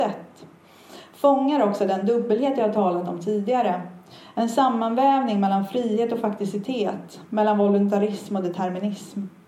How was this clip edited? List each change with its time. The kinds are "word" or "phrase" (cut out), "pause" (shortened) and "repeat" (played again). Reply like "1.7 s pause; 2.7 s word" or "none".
none